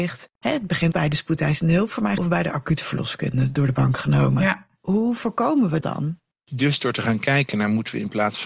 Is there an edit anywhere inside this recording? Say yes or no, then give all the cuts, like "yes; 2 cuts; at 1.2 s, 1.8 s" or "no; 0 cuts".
yes; 3 cuts; at 0.9 s, 2.2 s, 5.8 s